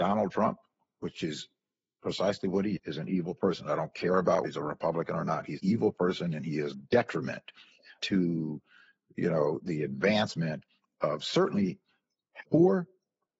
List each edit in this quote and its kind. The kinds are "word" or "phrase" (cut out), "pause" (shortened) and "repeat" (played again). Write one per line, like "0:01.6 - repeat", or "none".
0:02.8 - word
0:04.4 - word
0:05.6 - word
0:06.7 - word
0:08.0 - word
0:12.4 - word